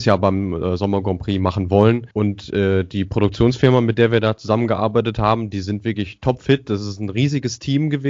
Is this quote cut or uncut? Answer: cut